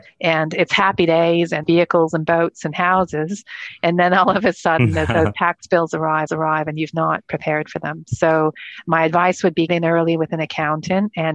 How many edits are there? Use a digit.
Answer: 3